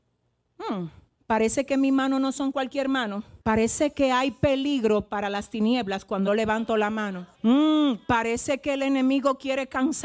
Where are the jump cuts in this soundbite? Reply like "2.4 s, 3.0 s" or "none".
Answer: 1.2 s, 3.4 s, 6.3 s, 7.3 s